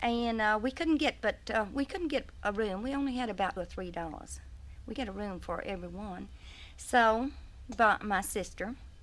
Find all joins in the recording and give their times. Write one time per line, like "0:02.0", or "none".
0:03.6
0:05.0